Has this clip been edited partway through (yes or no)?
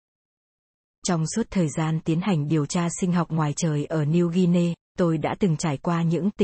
no